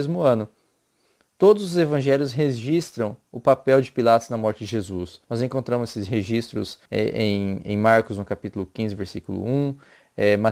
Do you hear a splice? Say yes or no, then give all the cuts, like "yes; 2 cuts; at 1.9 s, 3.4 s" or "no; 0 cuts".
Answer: yes; 2 cuts; at 5.2 s, 6.8 s